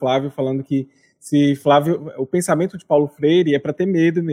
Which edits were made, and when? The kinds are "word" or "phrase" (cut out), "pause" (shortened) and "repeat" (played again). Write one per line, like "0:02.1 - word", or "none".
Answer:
none